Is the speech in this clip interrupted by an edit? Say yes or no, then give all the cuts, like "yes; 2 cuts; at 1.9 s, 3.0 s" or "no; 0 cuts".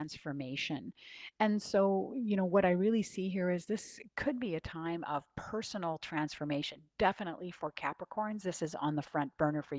no; 0 cuts